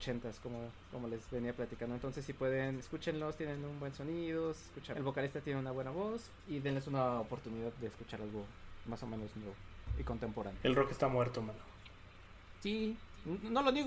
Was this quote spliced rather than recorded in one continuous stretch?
yes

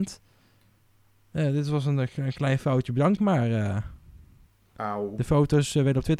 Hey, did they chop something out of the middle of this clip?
yes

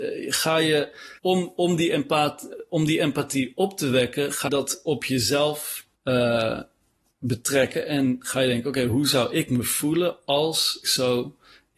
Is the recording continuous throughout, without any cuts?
no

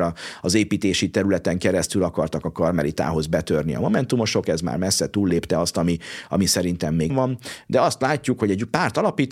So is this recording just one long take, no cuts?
no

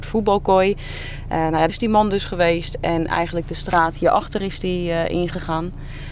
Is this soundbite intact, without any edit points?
no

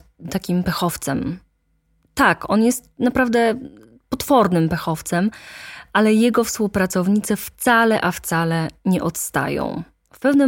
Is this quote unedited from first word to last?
yes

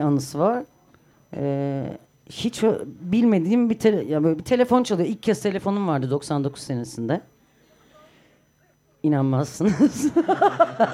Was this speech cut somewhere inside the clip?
no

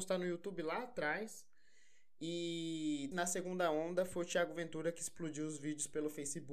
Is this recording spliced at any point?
yes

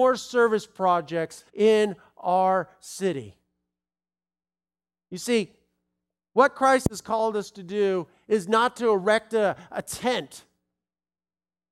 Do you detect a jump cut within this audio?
yes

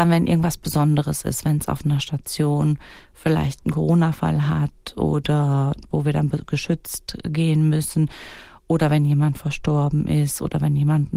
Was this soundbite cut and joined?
no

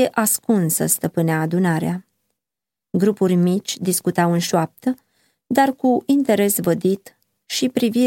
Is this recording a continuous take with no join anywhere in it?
yes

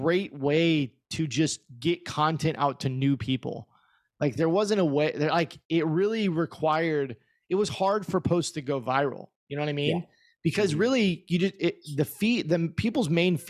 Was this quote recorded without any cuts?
yes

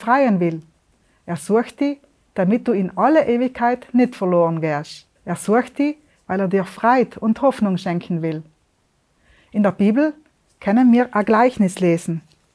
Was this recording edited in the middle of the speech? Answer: yes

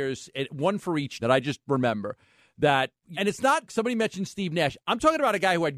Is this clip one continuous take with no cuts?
no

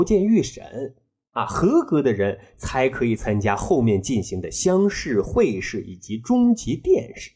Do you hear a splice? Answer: no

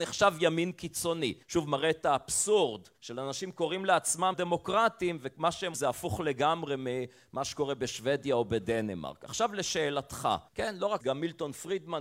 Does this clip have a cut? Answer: yes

